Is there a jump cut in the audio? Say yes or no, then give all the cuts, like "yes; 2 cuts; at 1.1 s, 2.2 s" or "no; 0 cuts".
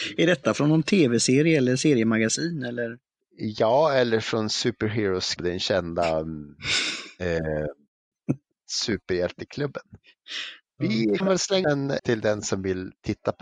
yes; 4 cuts; at 5.4 s, 11.2 s, 11.6 s, 12.0 s